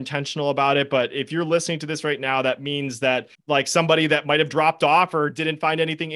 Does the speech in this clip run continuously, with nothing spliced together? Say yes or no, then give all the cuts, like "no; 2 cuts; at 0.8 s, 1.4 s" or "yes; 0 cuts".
no; 1 cut; at 3.3 s